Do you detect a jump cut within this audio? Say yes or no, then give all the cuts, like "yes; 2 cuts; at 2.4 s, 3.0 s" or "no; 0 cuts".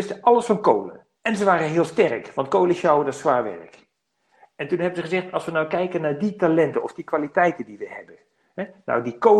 yes; 1 cut; at 1.1 s